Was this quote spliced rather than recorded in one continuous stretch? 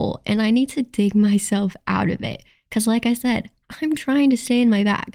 no; 0 cuts

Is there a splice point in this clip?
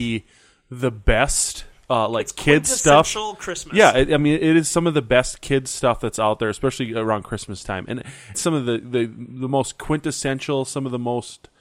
yes; 1 cut; at 8.3 s

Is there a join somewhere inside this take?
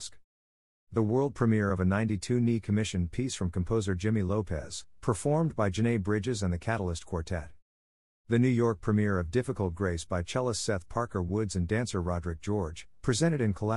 no; 0 cuts

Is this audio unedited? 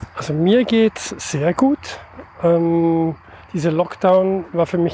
yes; 0 cuts

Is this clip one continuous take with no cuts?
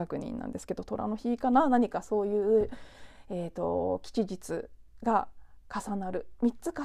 yes; 0 cuts

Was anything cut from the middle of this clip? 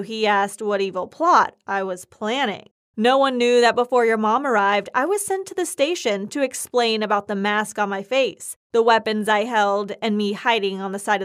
no; 0 cuts

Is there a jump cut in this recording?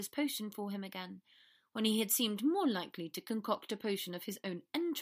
no; 0 cuts

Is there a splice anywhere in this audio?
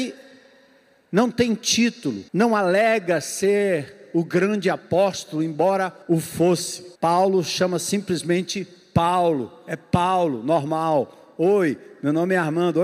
yes; 3 cuts; at 2.3 s, 6.0 s, 6.9 s

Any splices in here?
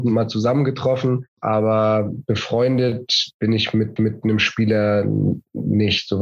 yes; 2 cuts; at 1.3 s, 4.0 s

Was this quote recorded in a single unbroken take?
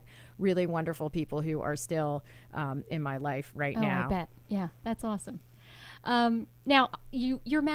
no; 1 cut; at 4.8 s

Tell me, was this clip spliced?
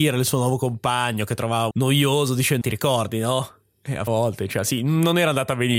yes; 3 cuts; at 1.7 s, 2.6 s, 4.1 s

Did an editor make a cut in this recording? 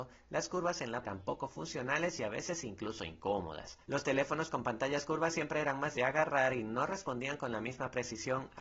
yes; 3 cuts; at 1.0 s, 3.8 s, 5.9 s

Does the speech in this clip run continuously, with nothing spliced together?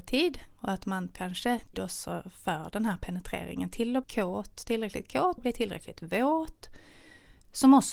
no; 4 cuts; at 1.1 s, 1.7 s, 4.0 s, 5.4 s

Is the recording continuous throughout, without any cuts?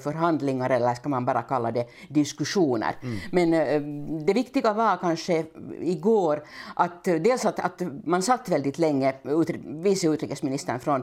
yes; 0 cuts

